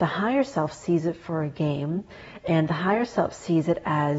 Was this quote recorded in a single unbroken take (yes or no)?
yes